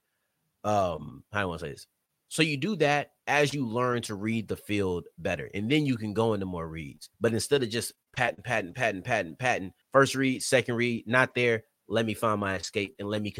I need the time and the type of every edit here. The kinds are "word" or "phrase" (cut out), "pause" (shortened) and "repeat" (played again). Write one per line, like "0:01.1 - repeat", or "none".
0:03.2 - pause
0:07.1 - pause
0:09.8 - pause